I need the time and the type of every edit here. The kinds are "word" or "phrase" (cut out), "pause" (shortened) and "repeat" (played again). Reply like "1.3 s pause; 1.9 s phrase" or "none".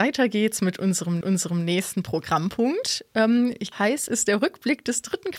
1.2 s repeat; 3.7 s word; 4.1 s word